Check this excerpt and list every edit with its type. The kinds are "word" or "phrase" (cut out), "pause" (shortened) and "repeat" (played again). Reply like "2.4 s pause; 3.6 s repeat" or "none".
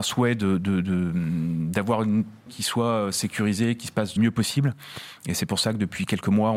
2.5 s word; 4.2 s word